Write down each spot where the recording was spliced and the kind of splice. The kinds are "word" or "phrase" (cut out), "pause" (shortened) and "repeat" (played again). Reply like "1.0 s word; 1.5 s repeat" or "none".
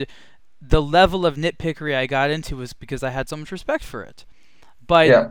none